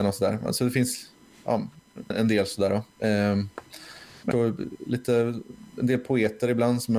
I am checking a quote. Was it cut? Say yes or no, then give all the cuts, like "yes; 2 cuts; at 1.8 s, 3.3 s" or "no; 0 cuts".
yes; 2 cuts; at 2.1 s, 4.3 s